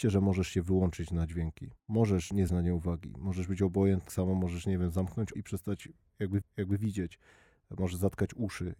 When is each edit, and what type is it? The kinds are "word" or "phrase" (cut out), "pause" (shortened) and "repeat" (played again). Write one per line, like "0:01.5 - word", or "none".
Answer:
0:01.8 - pause
0:02.5 - word
0:04.1 - word
0:05.3 - word
0:06.4 - repeat